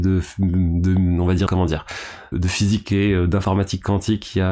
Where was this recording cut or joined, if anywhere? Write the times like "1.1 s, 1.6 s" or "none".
1.5 s, 2.3 s, 2.8 s

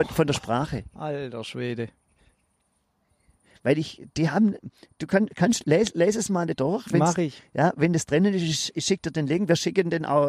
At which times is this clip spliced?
4.1 s

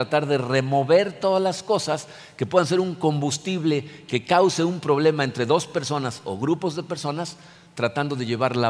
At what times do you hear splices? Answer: none

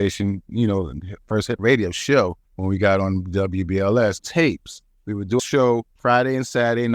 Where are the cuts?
1.6 s, 2.5 s, 4.2 s, 5.4 s, 5.9 s

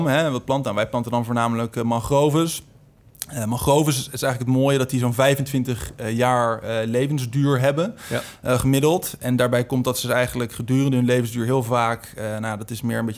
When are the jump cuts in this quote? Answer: none

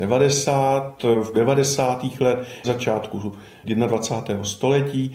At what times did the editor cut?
1.3 s, 2.6 s

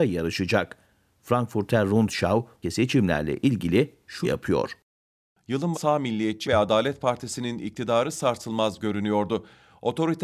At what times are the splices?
2.6 s, 4.2 s, 5.7 s, 6.4 s

